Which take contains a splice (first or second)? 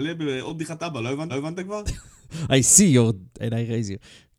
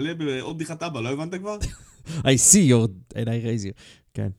first